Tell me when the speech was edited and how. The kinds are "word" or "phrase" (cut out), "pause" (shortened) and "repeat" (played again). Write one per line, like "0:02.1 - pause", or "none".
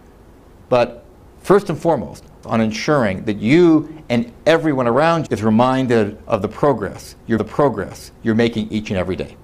0:02.4 - word
0:05.3 - word
0:07.4 - repeat